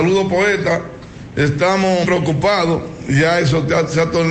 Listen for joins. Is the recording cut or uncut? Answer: cut